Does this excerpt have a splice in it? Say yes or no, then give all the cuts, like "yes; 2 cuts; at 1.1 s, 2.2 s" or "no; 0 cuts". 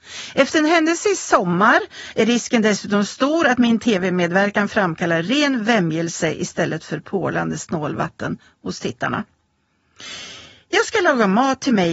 no; 0 cuts